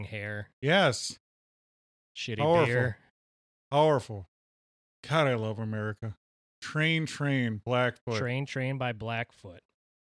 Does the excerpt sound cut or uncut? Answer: uncut